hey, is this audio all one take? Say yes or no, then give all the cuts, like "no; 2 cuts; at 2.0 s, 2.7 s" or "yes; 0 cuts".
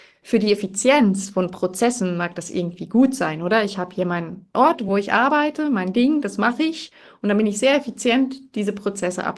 yes; 0 cuts